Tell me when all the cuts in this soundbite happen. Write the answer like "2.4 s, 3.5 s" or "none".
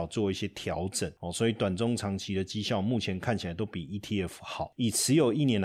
none